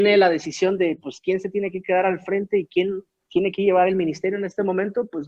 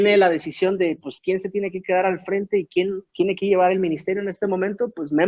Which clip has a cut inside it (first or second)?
second